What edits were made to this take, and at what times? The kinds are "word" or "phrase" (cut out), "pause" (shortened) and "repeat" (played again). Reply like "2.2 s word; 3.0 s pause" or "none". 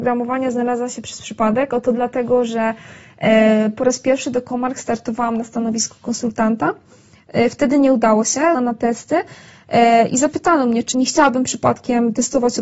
8.5 s phrase; 10.9 s word

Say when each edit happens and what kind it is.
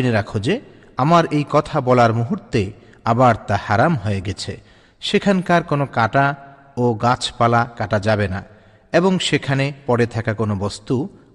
none

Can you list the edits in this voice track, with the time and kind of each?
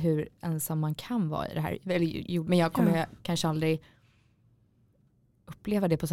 2.5 s phrase

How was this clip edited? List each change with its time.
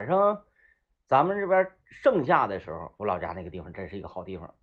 3.0 s pause

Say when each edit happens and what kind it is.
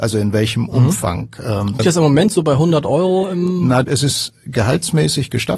1.8 s word; 3.8 s word

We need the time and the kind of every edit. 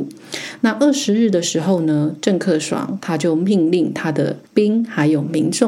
4.5 s pause

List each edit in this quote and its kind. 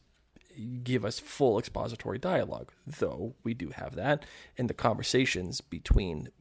none

